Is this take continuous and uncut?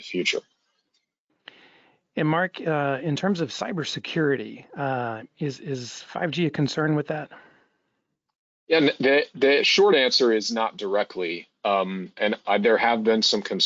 yes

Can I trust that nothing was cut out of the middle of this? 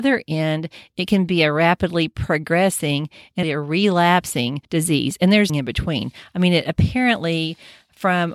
no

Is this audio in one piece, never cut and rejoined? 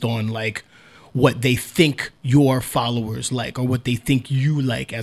yes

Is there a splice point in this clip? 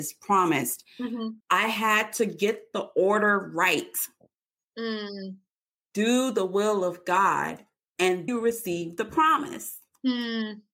yes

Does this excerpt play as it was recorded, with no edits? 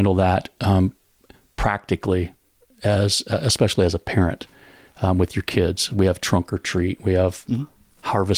yes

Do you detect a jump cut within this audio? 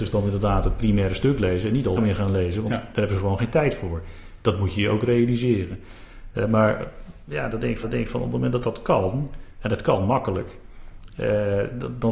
yes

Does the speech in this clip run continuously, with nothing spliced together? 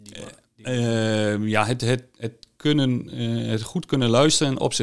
yes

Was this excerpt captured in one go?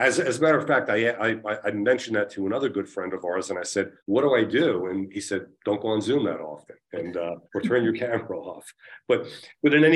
no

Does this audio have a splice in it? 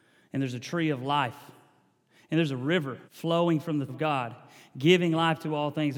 yes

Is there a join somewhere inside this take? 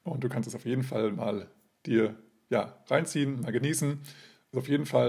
no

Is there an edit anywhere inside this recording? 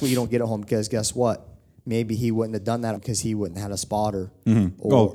yes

